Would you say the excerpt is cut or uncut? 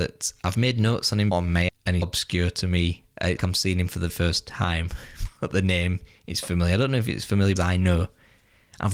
cut